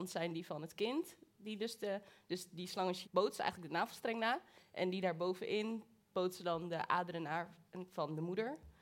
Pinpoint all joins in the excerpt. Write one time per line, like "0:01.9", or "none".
0:03.0